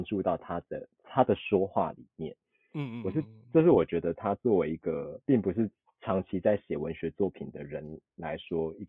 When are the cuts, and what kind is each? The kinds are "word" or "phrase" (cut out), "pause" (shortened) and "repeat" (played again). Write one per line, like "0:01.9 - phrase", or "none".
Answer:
0:05.2 - pause